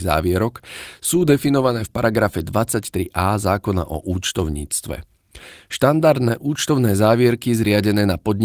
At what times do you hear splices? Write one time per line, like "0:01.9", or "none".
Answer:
none